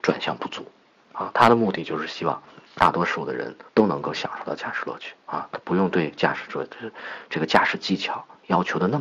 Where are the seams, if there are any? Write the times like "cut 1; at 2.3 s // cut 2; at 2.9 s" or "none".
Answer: cut 1; at 2.7 s // cut 2; at 3.7 s // cut 3; at 5.2 s